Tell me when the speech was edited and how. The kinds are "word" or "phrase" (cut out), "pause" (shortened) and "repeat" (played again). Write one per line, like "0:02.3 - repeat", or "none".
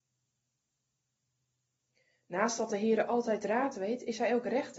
none